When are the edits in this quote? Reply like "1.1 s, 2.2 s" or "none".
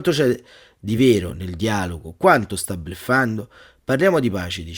none